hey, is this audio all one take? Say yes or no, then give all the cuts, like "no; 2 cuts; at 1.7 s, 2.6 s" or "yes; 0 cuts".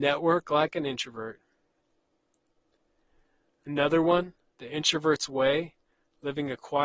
yes; 0 cuts